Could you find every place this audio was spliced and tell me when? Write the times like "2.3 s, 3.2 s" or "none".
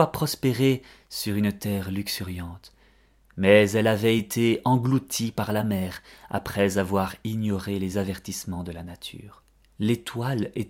none